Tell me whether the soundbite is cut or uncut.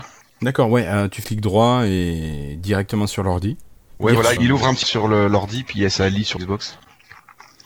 cut